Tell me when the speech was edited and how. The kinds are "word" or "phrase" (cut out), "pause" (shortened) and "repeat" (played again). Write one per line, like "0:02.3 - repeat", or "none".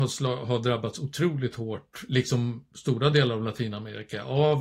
none